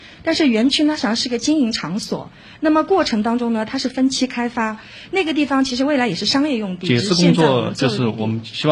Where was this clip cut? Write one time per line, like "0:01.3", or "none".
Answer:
none